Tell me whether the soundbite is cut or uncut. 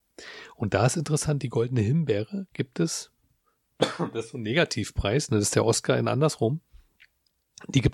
uncut